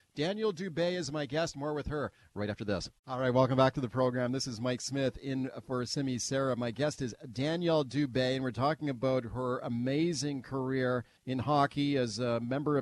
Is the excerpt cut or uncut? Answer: cut